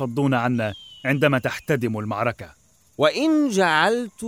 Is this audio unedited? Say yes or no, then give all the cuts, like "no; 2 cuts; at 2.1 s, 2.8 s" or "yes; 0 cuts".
yes; 0 cuts